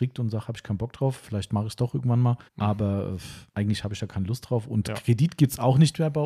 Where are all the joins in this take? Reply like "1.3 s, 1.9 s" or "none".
2.5 s, 3.5 s